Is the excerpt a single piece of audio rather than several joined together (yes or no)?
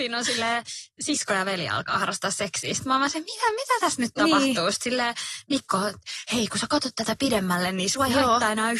yes